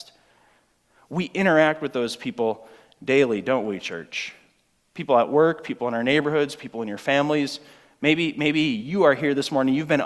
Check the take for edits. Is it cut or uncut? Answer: uncut